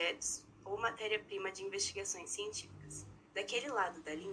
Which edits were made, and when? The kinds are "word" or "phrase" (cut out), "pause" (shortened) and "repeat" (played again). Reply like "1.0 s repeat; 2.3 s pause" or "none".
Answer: 3.3 s pause